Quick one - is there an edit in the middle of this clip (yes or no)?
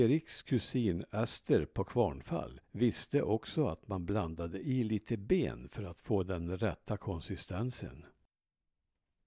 yes